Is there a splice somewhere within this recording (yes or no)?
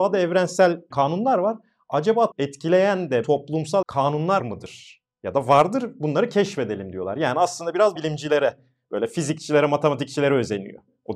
yes